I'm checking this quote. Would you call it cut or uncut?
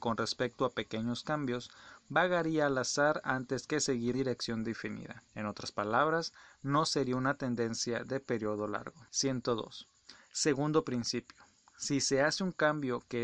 cut